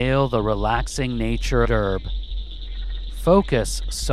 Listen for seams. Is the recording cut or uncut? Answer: cut